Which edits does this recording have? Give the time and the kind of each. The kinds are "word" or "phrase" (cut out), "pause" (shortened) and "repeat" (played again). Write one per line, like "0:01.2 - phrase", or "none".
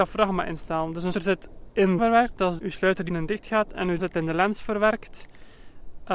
0:01.1 - word
0:02.0 - phrase
0:02.6 - word
0:03.1 - word
0:04.0 - word